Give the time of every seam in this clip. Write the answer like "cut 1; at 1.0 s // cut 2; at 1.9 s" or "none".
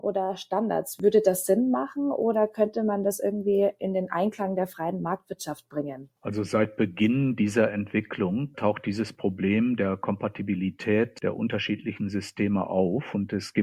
cut 1; at 6.2 s // cut 2; at 8.5 s